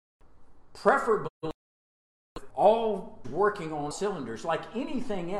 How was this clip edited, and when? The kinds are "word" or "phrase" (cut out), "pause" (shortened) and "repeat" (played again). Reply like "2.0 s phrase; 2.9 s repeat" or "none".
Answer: 2.5 s word; 3.2 s word; 3.9 s word